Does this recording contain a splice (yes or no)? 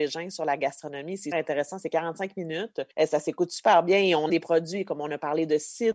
yes